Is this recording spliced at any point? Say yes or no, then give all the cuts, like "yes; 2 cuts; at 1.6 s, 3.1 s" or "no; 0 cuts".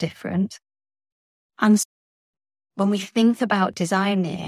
no; 0 cuts